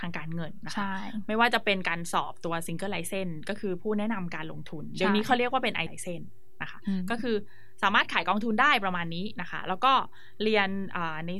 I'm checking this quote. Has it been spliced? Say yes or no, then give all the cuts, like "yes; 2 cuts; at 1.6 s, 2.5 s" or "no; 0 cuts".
yes; 1 cut; at 5.9 s